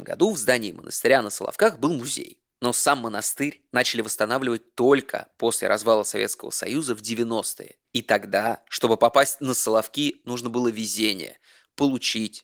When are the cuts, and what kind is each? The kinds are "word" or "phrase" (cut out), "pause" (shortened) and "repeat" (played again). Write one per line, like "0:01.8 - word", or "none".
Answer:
0:02.5 - pause